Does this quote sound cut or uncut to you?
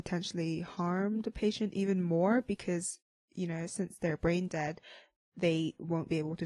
uncut